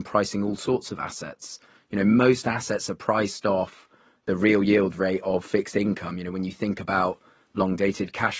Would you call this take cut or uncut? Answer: uncut